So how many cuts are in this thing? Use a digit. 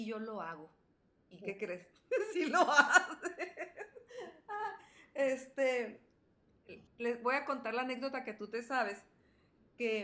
1